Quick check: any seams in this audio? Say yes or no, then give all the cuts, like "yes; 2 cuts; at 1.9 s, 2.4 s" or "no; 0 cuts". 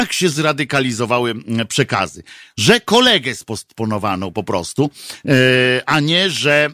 no; 0 cuts